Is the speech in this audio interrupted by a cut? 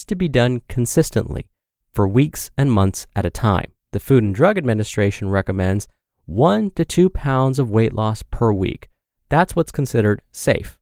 yes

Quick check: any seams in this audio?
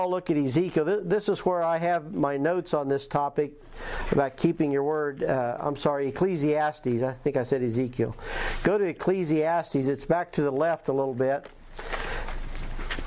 no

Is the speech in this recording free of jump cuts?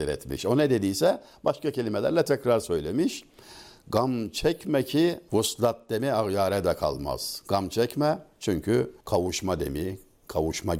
no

